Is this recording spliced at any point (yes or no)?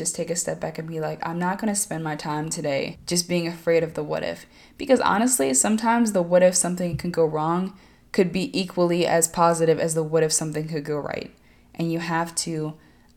no